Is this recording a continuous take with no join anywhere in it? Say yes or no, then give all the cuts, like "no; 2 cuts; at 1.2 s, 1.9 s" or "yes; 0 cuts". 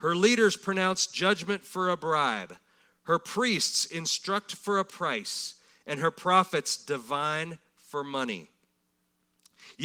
yes; 0 cuts